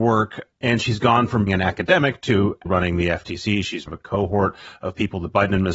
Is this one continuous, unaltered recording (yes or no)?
no